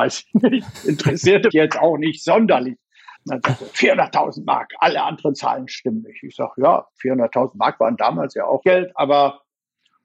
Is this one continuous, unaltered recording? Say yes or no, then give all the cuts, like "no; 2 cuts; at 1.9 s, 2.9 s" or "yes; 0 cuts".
no; 3 cuts; at 1.5 s, 3.2 s, 8.6 s